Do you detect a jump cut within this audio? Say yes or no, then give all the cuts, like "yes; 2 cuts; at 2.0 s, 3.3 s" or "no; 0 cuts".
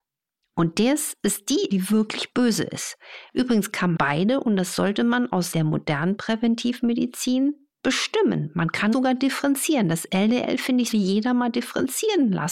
yes; 5 cuts; at 1.7 s, 4.0 s, 5.5 s, 8.9 s, 10.9 s